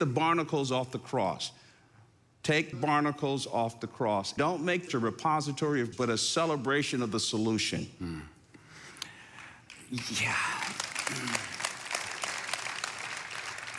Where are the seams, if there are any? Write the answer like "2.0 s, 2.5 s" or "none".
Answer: 2.7 s, 4.4 s, 4.9 s, 5.9 s